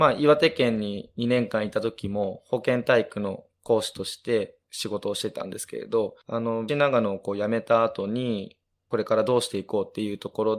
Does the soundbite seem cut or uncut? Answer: cut